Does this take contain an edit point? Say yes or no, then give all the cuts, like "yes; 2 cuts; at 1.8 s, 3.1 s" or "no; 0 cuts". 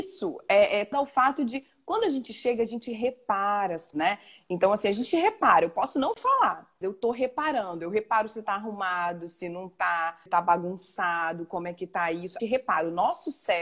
yes; 5 cuts; at 0.9 s, 3.9 s, 6.8 s, 10.3 s, 12.4 s